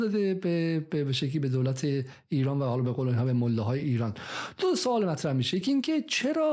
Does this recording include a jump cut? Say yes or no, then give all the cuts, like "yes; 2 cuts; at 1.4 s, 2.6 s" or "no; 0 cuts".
no; 0 cuts